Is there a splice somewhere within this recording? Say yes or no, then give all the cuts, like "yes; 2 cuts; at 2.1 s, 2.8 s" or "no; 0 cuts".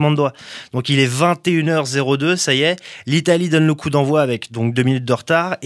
no; 0 cuts